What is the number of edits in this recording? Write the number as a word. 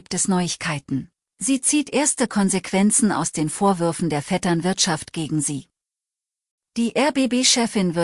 one